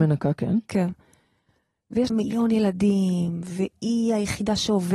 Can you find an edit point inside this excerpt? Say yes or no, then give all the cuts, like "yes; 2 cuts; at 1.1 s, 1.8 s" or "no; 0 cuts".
yes; 1 cut; at 2.1 s